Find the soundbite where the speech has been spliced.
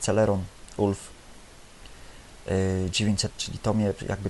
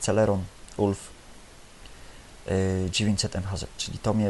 first; 1 cut; at 3.3 s

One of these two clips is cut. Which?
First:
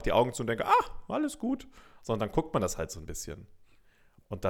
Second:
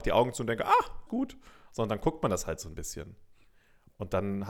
second; 1 cut; at 1.1 s

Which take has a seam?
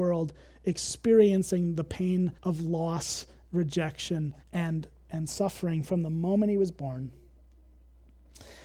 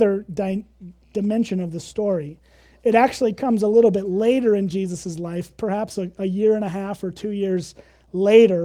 first; 2 cuts; at 2.4 s, 4.4 s

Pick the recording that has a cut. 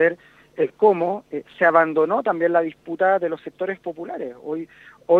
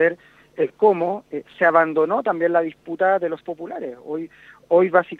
second; 1 cut; at 3.4 s

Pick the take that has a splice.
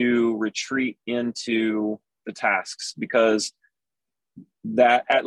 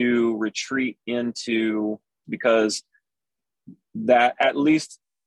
second; 1 cut; at 2.2 s

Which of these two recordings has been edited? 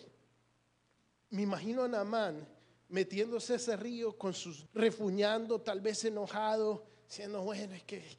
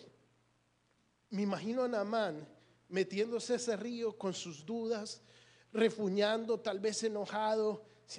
first; 1 cut; at 4.7 s

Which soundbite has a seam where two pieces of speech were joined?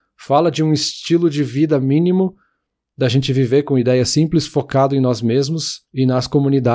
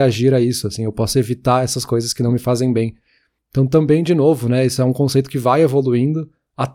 first; 1 cut; at 5.8 s

